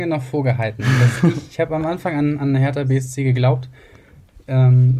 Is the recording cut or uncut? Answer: uncut